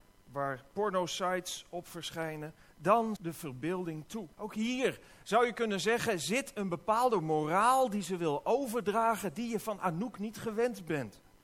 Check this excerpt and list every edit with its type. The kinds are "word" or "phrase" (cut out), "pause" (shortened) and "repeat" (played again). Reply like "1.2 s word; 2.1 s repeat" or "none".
3.2 s word; 4.3 s pause

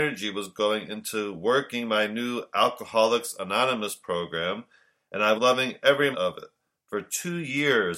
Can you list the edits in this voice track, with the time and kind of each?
5.3 s word; 6.1 s word

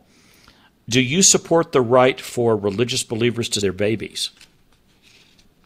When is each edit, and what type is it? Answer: 3.6 s word

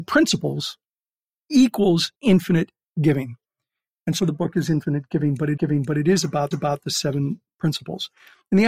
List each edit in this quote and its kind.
2.1 s pause; 4.2 s phrase; 5.6 s repeat; 6.5 s repeat

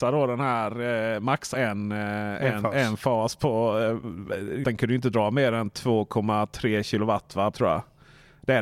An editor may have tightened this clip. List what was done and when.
1.5 s word; 4.6 s phrase; 7.5 s phrase

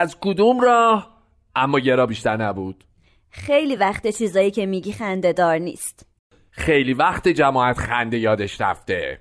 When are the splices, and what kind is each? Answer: none

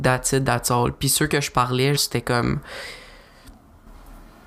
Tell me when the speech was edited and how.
2.0 s word

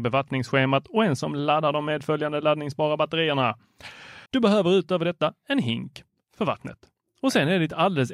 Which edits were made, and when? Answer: 1.2 s word; 4.3 s pause

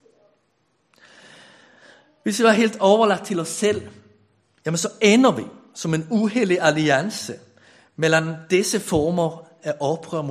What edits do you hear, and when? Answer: none

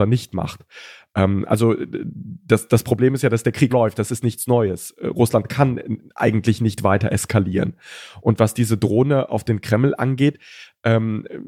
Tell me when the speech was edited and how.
3.7 s word

